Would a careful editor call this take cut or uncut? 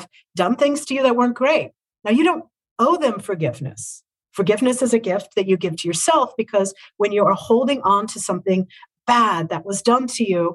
uncut